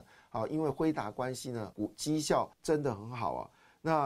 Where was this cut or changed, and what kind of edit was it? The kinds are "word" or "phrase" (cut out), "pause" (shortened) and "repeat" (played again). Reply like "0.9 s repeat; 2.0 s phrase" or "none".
1.7 s word; 2.5 s pause